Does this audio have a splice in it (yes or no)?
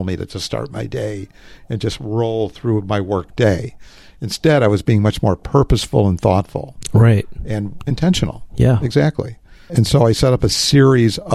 yes